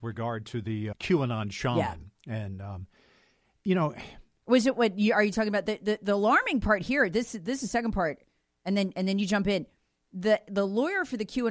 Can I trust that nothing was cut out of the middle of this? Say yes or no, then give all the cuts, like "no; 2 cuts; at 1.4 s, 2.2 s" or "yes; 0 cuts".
no; 1 cut; at 0.9 s